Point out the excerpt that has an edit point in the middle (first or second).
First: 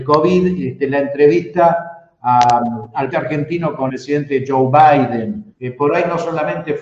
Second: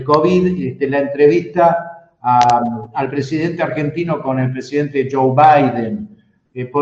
first